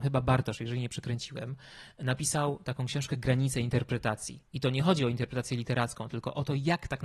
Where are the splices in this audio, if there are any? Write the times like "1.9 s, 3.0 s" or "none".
4.5 s